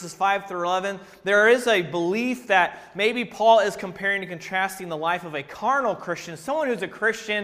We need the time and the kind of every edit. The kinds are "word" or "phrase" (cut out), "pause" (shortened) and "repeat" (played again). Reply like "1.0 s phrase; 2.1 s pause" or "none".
none